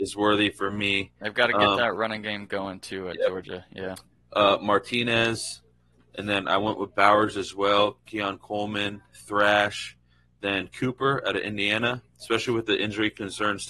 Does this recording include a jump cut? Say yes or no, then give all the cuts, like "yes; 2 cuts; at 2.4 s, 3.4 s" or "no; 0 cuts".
no; 0 cuts